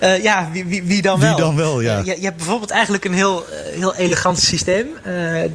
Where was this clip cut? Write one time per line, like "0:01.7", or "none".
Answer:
none

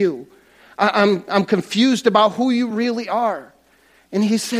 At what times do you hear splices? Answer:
none

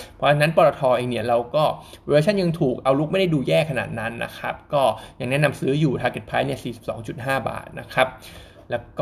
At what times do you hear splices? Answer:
none

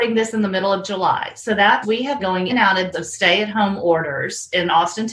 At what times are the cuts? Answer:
0:01.8
0:02.2
0:02.5
0:02.9

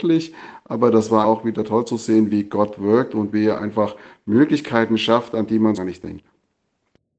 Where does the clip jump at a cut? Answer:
0:01.2
0:05.8

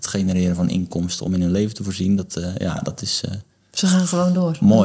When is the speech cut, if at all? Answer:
none

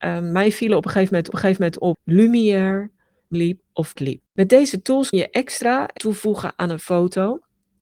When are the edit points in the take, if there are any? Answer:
0:01.3
0:03.3
0:04.0
0:04.3
0:05.1
0:06.0

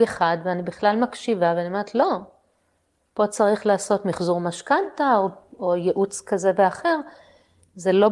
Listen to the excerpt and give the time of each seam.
none

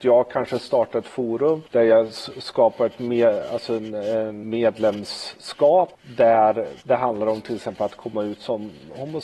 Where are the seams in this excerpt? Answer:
0:06.8

